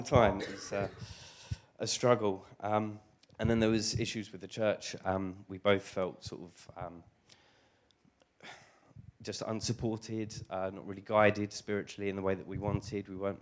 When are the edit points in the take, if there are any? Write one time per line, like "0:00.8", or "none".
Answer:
0:03.2